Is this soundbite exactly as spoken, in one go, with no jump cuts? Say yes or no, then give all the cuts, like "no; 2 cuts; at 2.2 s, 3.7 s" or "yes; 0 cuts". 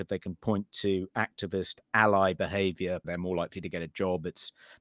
no; 1 cut; at 3.0 s